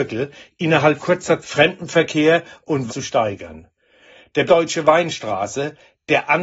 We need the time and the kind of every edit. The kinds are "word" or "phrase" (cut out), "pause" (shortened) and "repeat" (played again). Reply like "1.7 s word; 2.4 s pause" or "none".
1.0 s word; 1.4 s word; 2.9 s word; 4.5 s word

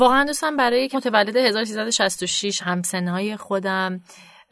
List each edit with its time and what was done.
0.9 s word; 2.6 s phrase

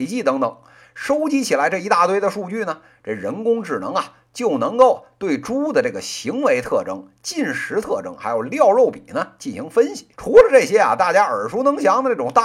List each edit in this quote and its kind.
10.1 s pause

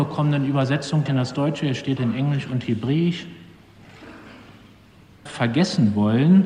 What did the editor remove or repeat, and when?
1.1 s word; 2.0 s word; 5.3 s word

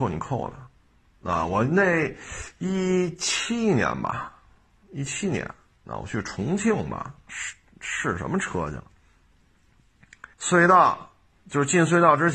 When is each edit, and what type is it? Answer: 7.3 s word; 10.3 s pause

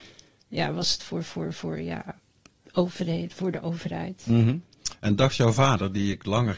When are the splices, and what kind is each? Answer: none

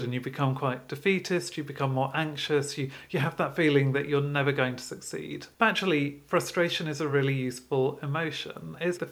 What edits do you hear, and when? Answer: none

